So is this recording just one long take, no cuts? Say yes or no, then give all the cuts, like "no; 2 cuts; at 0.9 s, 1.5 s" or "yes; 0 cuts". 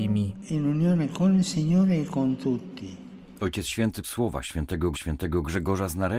no; 2 cuts; at 4.0 s, 4.9 s